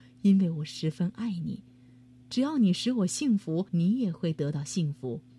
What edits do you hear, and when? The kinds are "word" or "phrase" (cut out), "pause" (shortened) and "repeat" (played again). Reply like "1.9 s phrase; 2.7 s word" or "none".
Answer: 3.7 s pause